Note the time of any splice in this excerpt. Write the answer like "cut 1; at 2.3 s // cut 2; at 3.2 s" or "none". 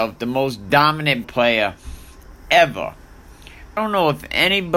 cut 1; at 1.2 s // cut 2; at 3.8 s